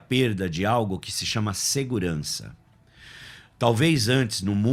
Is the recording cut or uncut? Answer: uncut